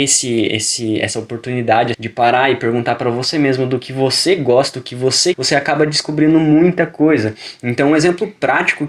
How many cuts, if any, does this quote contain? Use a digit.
2